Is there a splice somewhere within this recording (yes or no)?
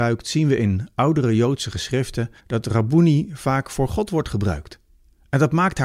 yes